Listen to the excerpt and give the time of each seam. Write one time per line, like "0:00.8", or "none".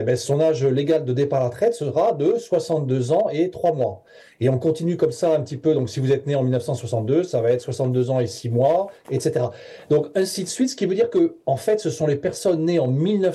none